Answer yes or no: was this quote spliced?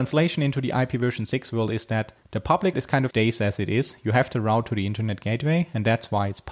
yes